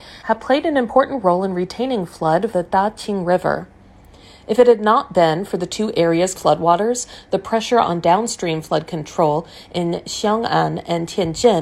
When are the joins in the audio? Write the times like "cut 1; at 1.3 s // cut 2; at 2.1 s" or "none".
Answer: cut 1; at 2.5 s // cut 2; at 6.4 s